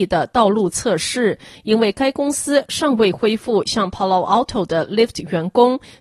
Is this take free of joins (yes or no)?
yes